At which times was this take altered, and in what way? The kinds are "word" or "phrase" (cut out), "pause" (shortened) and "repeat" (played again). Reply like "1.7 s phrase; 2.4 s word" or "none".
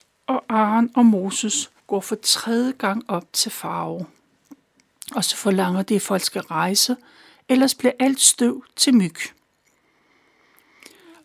1.8 s pause